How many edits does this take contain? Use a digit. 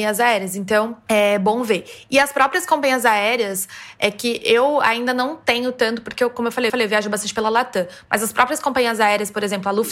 1